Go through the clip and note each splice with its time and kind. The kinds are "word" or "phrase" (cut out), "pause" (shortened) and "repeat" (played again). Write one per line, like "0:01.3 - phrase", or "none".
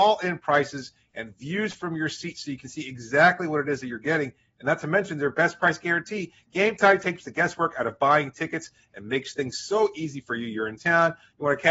none